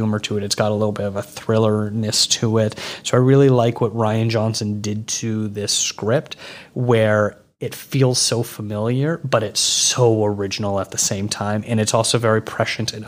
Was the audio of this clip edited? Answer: no; 0 cuts

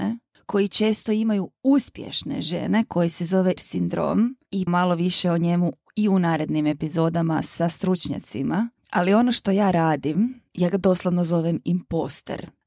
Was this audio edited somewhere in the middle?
yes; 2 cuts; at 3.6 s, 4.7 s

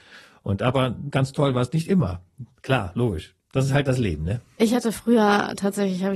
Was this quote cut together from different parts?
no; 0 cuts

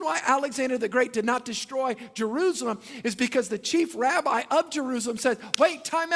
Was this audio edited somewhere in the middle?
no; 0 cuts

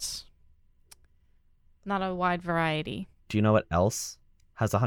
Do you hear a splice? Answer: yes; 1 cut; at 3.2 s

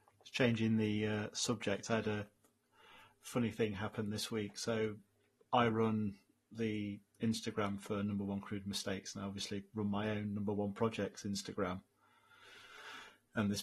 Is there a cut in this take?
no; 0 cuts

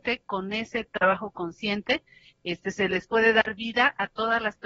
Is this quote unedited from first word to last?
yes; 0 cuts

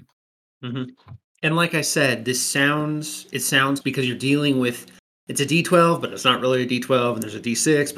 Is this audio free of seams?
no; 1 cut; at 3.8 s

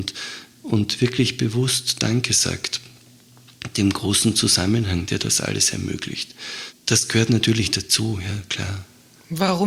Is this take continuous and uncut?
no; 1 cut; at 6.8 s

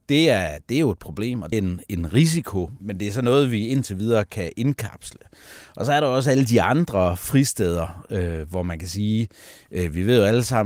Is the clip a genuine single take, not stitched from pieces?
no; 2 cuts; at 1.5 s, 2.8 s

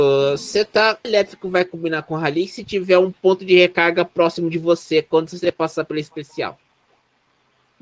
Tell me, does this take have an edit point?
yes; 1 cut; at 1.0 s

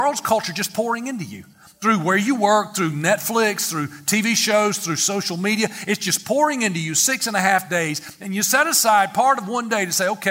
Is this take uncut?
yes; 0 cuts

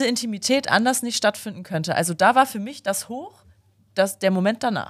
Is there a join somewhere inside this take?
no; 0 cuts

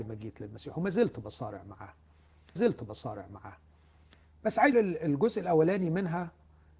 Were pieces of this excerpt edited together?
yes; 2 cuts; at 2.6 s, 4.7 s

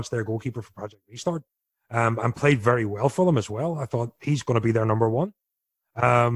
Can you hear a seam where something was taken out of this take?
no; 0 cuts

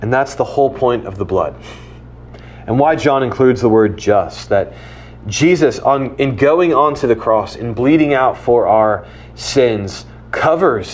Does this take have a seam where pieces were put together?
no; 0 cuts

